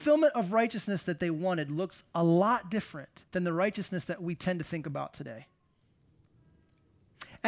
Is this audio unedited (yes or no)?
no